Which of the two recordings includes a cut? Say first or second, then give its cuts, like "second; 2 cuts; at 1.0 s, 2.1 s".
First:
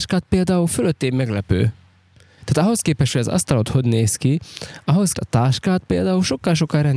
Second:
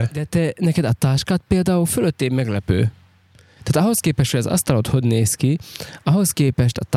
first; 1 cut; at 5.1 s